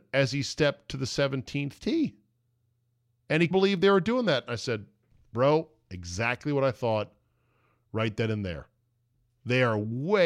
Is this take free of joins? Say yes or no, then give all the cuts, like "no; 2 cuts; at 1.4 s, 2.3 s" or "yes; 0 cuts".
no; 2 cuts; at 3.5 s, 5.1 s